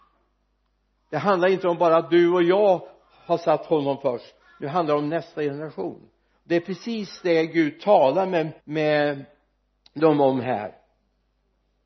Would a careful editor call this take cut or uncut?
cut